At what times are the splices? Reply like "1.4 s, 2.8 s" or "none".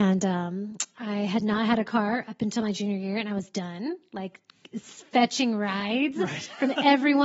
none